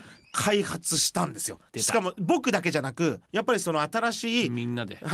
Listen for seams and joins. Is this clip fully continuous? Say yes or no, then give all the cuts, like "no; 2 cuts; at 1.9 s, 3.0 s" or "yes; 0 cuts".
no; 2 cuts; at 1.7 s, 3.2 s